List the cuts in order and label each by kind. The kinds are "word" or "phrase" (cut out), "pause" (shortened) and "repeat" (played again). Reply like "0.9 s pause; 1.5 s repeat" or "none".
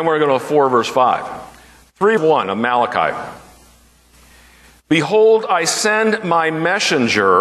2.2 s word

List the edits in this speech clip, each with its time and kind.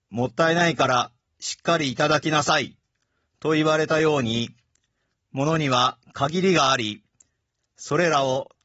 none

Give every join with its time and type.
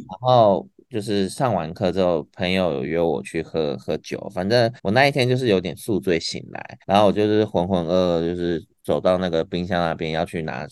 4.8 s pause; 6.8 s pause; 8.8 s pause

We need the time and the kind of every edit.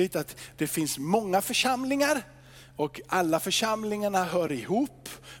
none

